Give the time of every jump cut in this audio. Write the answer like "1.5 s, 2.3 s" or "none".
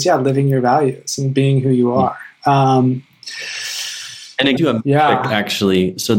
4.6 s